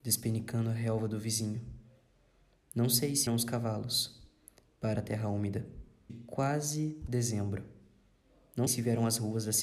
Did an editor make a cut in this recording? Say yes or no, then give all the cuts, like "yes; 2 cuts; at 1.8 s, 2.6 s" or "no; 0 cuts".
yes; 4 cuts; at 3.3 s, 5.0 s, 6.1 s, 8.7 s